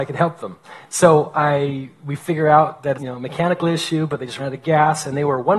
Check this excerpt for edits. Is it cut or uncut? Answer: cut